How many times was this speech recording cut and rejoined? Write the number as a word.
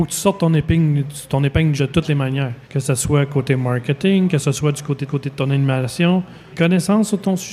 four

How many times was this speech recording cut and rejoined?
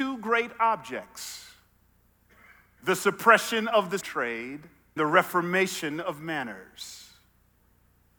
two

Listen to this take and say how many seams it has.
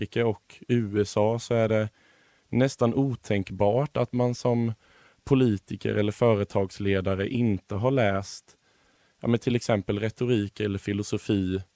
zero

